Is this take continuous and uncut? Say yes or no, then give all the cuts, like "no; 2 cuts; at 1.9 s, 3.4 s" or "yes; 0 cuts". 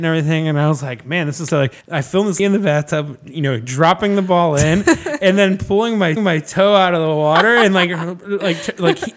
no; 4 cuts; at 1.5 s, 1.8 s, 2.4 s, 6.2 s